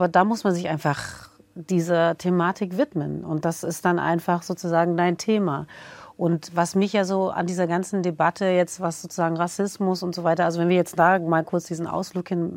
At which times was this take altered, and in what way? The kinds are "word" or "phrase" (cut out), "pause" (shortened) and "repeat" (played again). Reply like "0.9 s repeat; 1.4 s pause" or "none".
none